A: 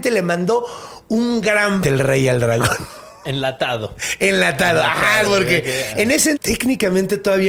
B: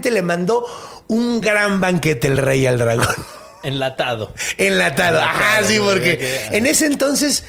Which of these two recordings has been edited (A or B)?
A